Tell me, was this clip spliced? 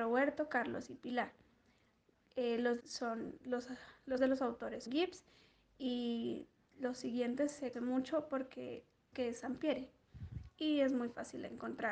yes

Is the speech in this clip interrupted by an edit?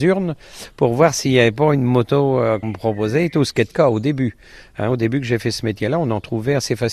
yes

